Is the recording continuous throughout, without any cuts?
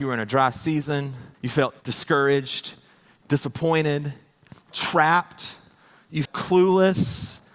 no; 5 cuts; at 1.3 s, 1.8 s, 3.2 s, 4.7 s, 6.2 s

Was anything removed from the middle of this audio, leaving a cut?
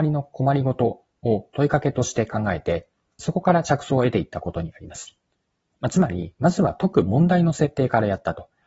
no; 0 cuts

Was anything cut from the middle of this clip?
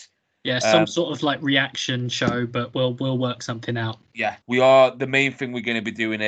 yes; 1 cut; at 4.4 s

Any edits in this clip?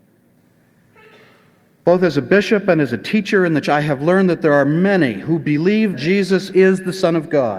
yes; 2 cuts; at 3.6 s, 5.9 s

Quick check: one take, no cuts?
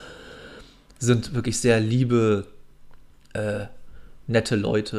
yes; 0 cuts

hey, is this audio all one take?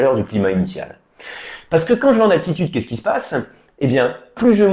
yes; 0 cuts

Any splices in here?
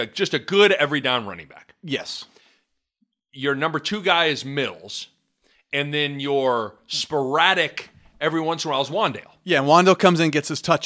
no; 0 cuts

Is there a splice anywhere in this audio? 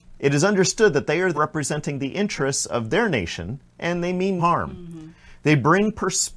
yes; 2 cuts; at 1.3 s, 4.4 s

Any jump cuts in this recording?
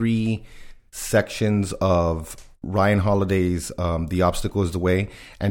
no; 0 cuts

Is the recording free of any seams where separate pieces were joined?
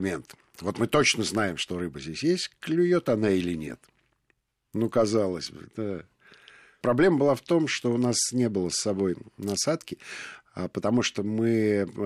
yes; 0 cuts

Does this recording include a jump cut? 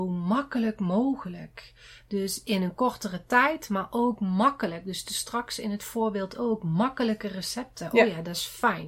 no; 0 cuts

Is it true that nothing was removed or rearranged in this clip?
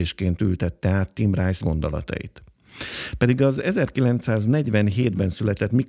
no; 1 cut; at 1.6 s

